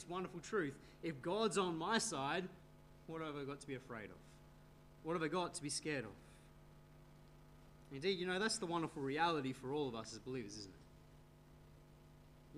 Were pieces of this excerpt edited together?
no; 0 cuts

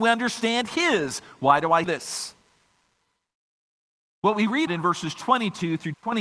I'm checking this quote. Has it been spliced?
yes; 2 cuts; at 1.8 s, 4.7 s

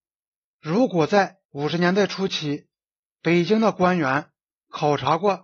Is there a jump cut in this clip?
yes; 1 cut; at 1.4 s

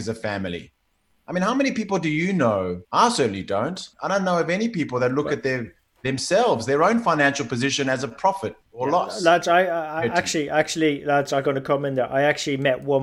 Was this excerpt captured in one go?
no; 3 cuts; at 2.8 s, 3.9 s, 8.6 s

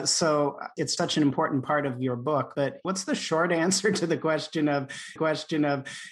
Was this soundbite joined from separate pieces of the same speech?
yes; 2 cuts; at 1.0 s, 5.2 s

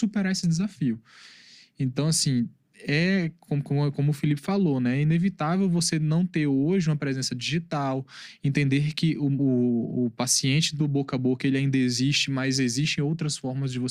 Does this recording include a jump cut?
no; 0 cuts

